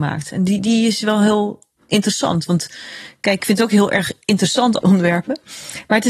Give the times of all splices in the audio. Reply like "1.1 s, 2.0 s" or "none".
3.4 s, 4.8 s